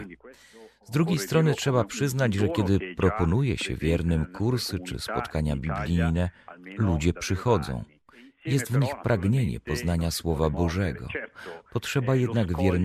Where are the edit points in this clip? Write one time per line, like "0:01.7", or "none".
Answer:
none